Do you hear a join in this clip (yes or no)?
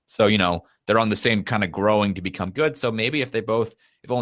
no